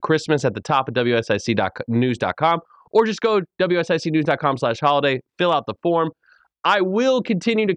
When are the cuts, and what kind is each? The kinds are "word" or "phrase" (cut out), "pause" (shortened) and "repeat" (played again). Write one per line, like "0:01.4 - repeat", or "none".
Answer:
none